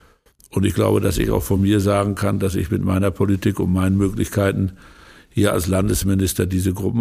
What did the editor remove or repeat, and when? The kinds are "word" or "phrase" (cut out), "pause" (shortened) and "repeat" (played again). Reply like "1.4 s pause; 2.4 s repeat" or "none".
none